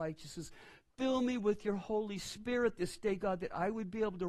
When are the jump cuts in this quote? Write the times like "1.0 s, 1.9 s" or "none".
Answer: none